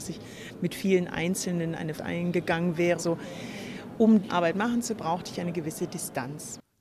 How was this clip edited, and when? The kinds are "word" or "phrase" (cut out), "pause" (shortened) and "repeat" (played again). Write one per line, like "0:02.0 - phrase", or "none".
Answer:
0:02.0 - word
0:03.0 - word
0:04.3 - word
0:05.0 - word